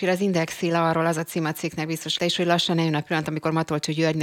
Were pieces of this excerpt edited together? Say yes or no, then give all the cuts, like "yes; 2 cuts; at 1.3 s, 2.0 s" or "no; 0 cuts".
yes; 1 cut; at 2.2 s